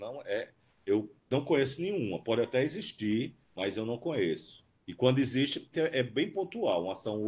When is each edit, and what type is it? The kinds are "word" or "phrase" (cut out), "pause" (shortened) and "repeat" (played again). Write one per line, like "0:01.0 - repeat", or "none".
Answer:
0:01.2 - pause
0:03.4 - pause
0:04.7 - pause
0:05.7 - word